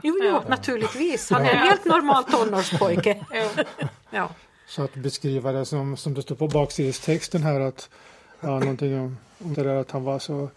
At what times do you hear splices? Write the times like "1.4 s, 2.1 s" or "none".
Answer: 9.5 s